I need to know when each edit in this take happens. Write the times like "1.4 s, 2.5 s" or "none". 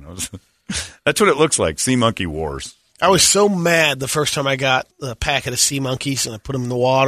4.9 s